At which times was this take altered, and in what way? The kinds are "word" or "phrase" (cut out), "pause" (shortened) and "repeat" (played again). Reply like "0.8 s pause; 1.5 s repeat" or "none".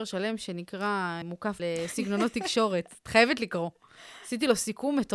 1.2 s word; 1.6 s phrase